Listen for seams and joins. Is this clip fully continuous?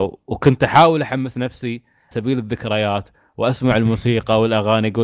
no; 1 cut; at 2.1 s

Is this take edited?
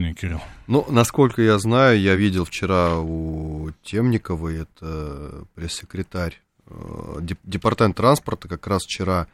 no; 0 cuts

